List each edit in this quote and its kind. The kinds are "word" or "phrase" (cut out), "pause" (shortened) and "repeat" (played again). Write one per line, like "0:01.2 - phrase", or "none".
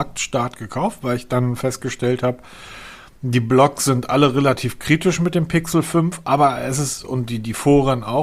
none